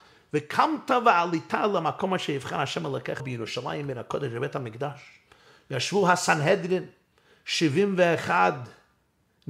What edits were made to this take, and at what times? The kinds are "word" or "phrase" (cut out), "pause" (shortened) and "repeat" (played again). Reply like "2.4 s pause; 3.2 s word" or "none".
3.2 s word